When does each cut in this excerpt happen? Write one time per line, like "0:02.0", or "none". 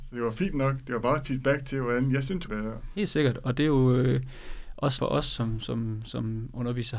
0:02.5
0:05.0

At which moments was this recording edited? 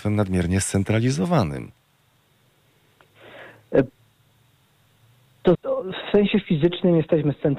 0:05.5

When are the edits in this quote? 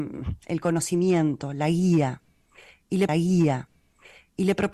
0:03.1

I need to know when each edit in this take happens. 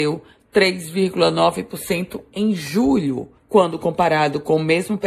0:03.4

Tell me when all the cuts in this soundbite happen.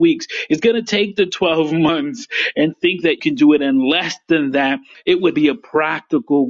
0:02.7
0:03.2
0:04.9
0:05.3

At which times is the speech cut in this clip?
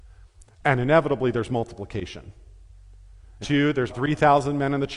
0:03.4
0:03.9

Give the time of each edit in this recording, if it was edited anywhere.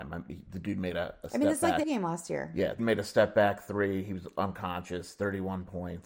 0:01.8
0:02.8

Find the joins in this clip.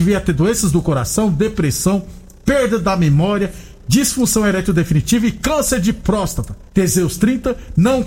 0:06.7

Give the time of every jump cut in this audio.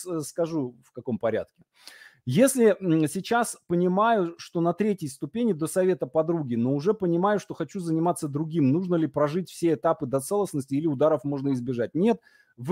none

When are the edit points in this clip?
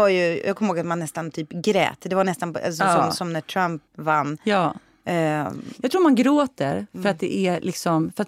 0:03.9

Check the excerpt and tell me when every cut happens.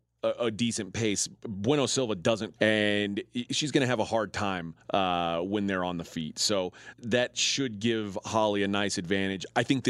0:02.6
0:03.5
0:04.8
0:06.9

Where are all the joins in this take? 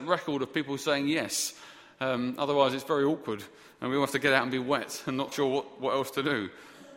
0:05.3

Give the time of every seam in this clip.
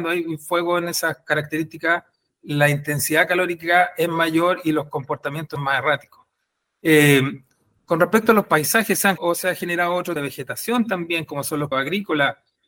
0:05.6
0:09.2
0:10.2
0:11.7

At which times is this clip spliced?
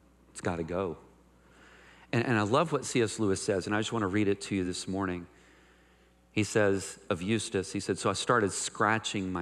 none

